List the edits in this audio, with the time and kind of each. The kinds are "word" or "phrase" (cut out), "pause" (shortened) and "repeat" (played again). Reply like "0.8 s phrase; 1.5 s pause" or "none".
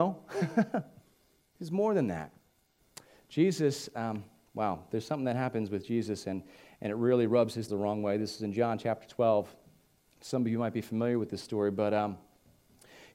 7.7 s word

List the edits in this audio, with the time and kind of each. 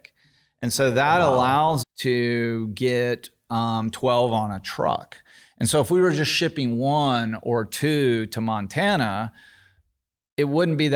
1.8 s word

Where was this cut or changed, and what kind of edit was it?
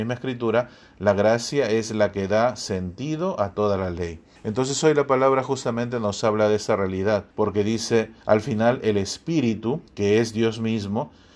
4.4 s pause; 7.3 s pause; 8.2 s pause; 9.9 s pause

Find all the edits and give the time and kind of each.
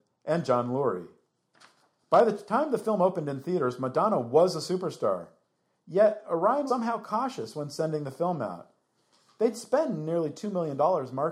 6.7 s word

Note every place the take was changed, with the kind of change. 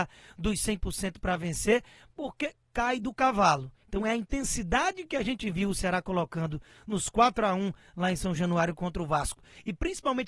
none

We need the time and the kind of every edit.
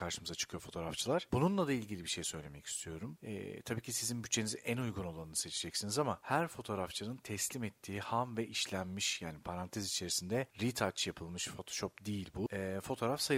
none

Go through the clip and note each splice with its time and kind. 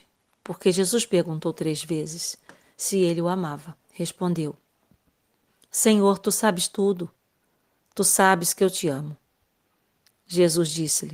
3.8 s pause

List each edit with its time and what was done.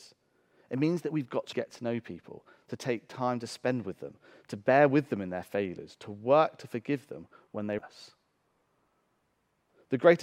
1.5 s word; 7.8 s word

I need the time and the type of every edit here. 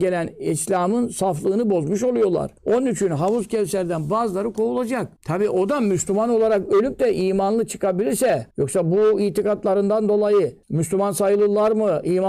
2.6 s pause; 5.2 s pause; 8.5 s pause; 10.6 s pause

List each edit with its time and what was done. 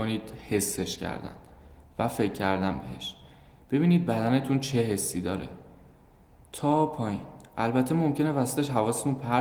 none

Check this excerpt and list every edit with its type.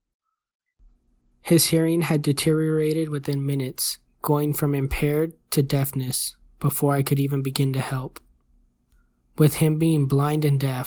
none

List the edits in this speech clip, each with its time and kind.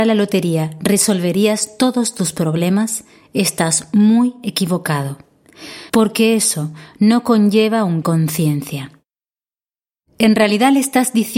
5.9 s pause; 8.0 s phrase

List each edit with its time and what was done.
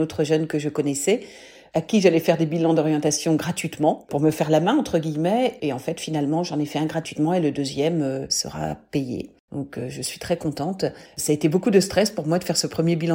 11.1 s pause

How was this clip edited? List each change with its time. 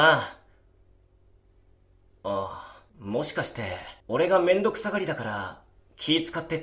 2.9 s pause; 4.0 s pause

